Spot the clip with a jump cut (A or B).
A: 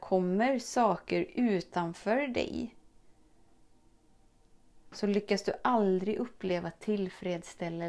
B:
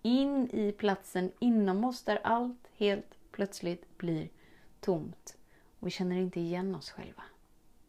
B